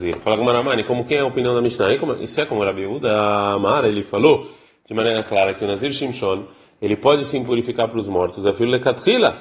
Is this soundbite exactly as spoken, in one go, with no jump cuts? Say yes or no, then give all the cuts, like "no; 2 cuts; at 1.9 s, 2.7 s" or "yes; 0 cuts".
yes; 0 cuts